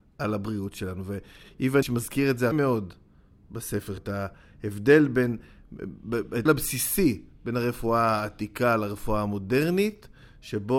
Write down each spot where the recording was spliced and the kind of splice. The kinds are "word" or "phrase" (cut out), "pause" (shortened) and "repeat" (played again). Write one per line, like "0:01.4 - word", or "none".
0:01.8 - word
0:02.5 - word
0:04.0 - word
0:06.5 - word